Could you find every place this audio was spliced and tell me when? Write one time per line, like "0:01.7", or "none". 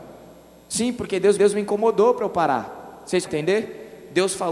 0:01.4
0:03.3